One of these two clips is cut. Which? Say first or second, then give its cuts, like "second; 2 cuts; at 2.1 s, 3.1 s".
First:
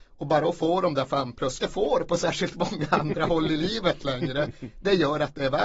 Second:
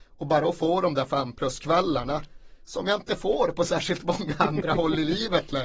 first; 1 cut; at 1.6 s